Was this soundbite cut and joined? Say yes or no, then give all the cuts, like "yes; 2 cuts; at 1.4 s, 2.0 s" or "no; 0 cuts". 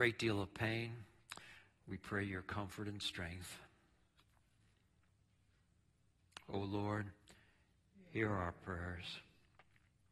no; 0 cuts